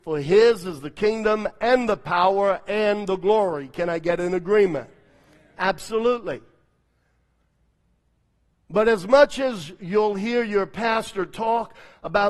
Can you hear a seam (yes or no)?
no